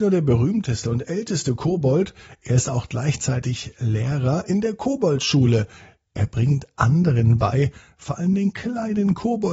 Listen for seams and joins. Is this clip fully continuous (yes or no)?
yes